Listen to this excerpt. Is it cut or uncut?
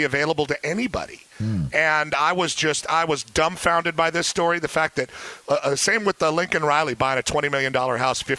uncut